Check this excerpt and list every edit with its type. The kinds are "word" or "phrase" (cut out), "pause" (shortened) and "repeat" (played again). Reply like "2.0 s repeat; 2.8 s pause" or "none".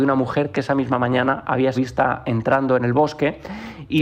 1.7 s word